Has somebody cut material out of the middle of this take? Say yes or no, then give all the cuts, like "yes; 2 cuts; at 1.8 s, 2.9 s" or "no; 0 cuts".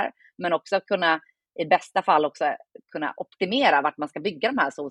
no; 0 cuts